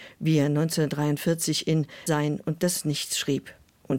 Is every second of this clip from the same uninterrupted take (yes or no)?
no